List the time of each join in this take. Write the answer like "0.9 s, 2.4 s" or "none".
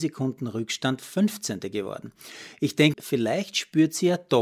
2.9 s